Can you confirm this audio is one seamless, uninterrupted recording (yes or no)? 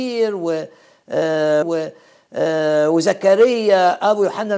no